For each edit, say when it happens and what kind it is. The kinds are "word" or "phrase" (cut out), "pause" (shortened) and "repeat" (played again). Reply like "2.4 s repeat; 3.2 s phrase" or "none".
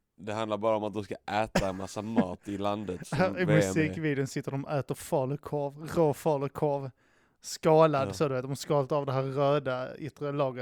none